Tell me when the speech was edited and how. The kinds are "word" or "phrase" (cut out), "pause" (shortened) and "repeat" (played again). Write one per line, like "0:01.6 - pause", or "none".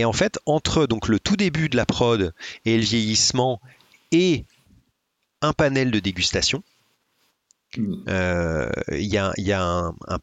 none